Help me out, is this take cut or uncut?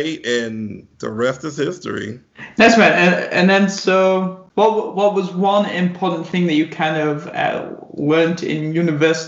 cut